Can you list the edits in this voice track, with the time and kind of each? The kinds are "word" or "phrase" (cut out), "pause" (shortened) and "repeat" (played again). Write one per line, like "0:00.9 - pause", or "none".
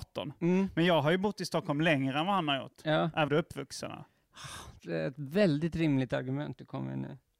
0:03.3 - phrase
0:04.8 - phrase